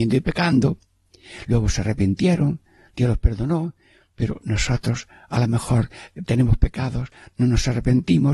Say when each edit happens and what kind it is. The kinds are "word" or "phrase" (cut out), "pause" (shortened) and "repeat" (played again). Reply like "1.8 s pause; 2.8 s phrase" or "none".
6.3 s word